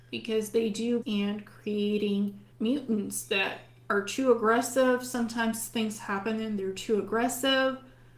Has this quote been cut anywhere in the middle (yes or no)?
yes